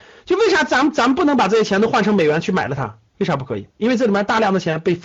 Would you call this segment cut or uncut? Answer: cut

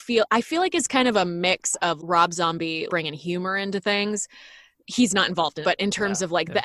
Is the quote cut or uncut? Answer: cut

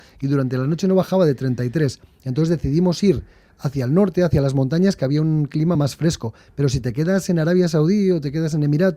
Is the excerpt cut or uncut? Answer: uncut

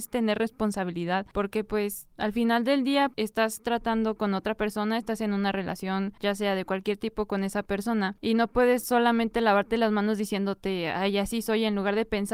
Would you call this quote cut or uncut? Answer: uncut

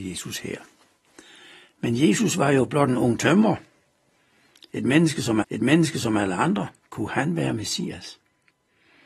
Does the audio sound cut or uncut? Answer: cut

